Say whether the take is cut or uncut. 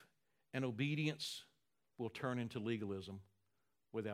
uncut